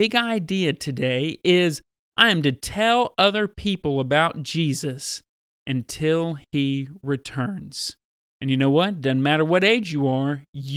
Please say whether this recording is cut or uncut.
uncut